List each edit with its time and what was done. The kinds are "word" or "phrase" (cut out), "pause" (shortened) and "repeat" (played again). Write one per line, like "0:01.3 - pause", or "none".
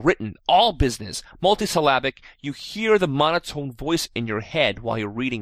none